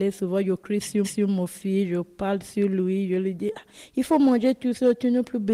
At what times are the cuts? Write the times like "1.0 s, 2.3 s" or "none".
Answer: 1.0 s